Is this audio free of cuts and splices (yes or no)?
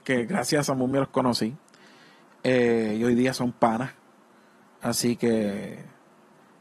yes